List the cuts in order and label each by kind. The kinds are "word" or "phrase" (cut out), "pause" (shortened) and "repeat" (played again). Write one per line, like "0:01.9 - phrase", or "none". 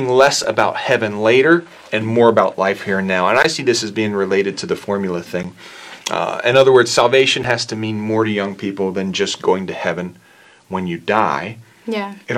none

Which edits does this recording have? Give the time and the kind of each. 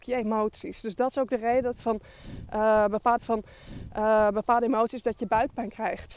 0:03.2 - repeat

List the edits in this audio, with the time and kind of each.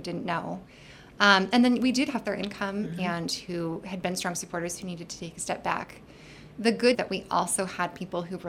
0:02.2 - phrase
0:06.9 - phrase

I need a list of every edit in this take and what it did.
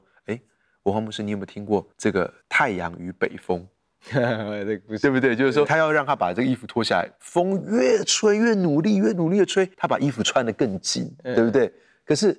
0:01.9 - pause
0:02.4 - pause
0:05.7 - phrase
0:09.7 - pause

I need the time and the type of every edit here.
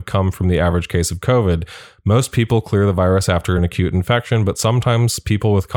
none

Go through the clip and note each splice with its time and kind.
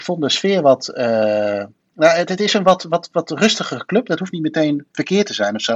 none

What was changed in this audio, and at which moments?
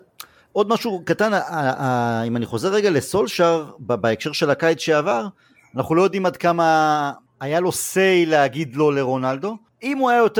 none

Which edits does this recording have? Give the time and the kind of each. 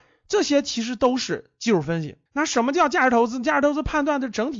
0:02.2 - pause

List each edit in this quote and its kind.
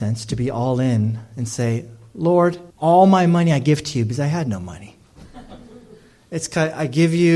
0:02.7 - pause

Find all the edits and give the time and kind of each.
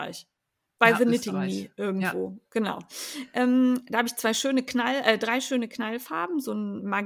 none

